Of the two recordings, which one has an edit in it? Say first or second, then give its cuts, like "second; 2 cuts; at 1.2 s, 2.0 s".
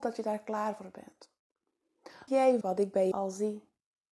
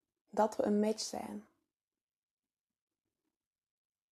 first; 3 cuts; at 2.3 s, 2.6 s, 3.1 s